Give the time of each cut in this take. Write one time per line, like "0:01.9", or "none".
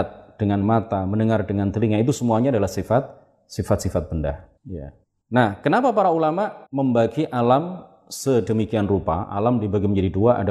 0:04.6
0:05.0
0:06.7